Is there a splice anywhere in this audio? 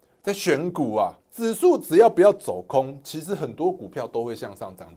yes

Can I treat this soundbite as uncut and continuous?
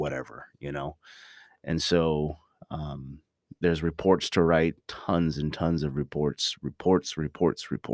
yes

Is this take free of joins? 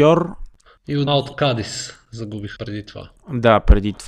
no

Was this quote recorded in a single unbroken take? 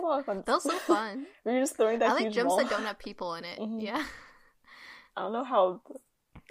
yes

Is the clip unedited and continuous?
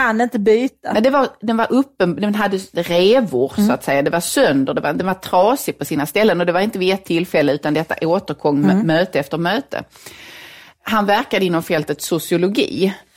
yes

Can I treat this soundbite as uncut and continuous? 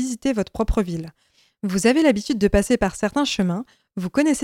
yes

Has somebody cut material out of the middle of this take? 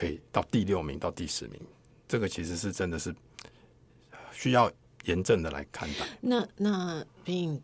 no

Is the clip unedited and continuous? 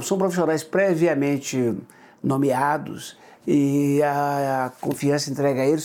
yes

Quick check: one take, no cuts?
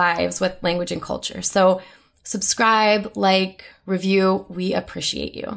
yes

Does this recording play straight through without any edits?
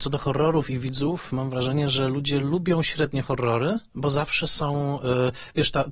yes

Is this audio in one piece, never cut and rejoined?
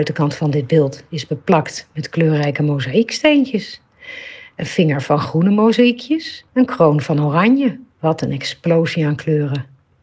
no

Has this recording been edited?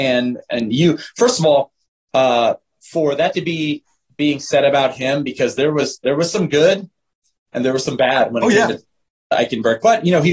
no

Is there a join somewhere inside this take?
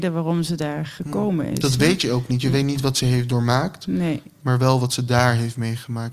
no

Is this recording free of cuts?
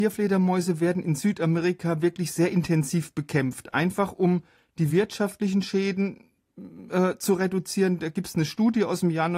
yes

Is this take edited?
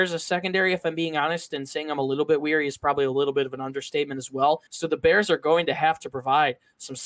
yes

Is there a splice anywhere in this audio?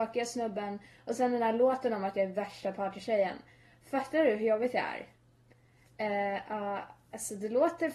no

